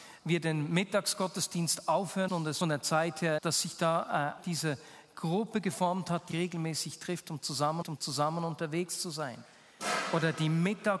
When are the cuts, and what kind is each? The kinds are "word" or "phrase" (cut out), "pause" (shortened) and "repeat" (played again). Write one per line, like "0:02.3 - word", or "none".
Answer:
0:02.3 - word
0:02.6 - phrase
0:03.4 - phrase
0:04.4 - word
0:06.3 - phrase
0:07.8 - repeat